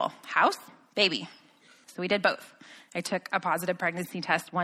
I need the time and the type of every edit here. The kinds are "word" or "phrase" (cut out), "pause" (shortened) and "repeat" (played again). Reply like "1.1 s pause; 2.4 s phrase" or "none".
none